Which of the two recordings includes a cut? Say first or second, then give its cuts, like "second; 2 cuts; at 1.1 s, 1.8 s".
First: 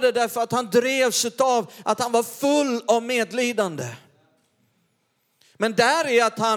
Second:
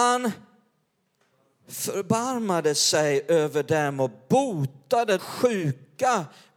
second; 1 cut; at 5.2 s